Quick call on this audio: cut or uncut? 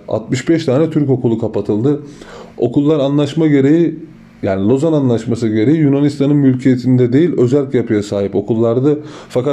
uncut